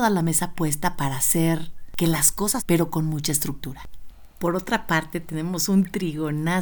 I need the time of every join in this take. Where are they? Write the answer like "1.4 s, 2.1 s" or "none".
2.6 s